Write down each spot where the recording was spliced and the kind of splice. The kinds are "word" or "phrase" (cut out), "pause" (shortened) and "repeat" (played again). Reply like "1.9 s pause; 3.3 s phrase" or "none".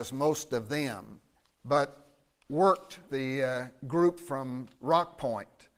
1.3 s pause; 3.1 s word; 4.7 s pause